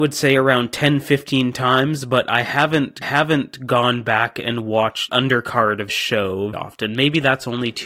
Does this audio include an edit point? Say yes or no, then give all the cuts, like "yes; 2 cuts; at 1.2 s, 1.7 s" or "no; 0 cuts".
yes; 4 cuts; at 3.0 s, 5.1 s, 5.9 s, 6.5 s